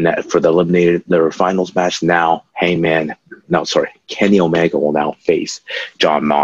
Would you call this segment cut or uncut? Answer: cut